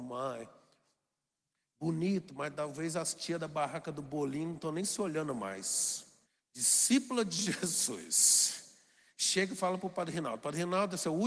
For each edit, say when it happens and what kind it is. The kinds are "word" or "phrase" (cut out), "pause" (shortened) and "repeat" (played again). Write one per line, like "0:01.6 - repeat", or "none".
0:06.2 - pause